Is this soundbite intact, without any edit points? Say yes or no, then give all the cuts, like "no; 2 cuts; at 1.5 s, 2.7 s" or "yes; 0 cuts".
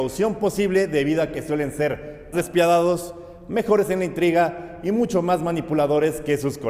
no; 1 cut; at 2.3 s